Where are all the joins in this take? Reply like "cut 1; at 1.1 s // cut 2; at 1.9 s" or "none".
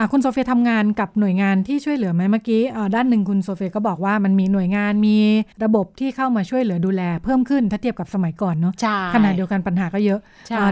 cut 1; at 5.5 s